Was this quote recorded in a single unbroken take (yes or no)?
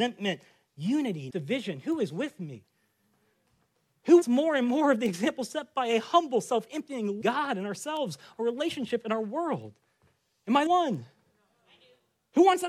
no